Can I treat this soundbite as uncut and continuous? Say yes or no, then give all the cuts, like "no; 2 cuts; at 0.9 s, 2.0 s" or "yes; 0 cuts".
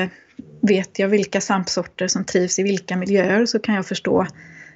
yes; 0 cuts